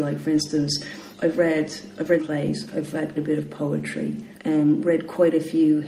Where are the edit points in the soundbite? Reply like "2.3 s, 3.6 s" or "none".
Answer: 1.1 s, 2.2 s, 3.2 s, 4.4 s